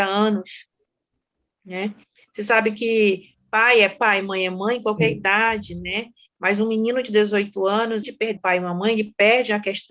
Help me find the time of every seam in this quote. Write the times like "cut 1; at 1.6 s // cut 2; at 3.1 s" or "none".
cut 1; at 8.0 s // cut 2; at 8.4 s